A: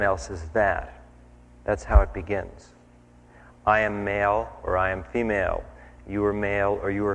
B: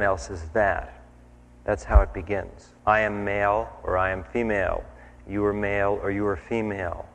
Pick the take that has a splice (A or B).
B